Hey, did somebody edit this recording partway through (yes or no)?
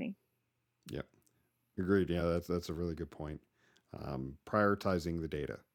no